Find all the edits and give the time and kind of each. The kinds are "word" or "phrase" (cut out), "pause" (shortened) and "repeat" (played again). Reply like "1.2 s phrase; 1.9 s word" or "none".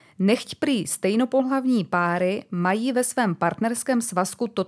none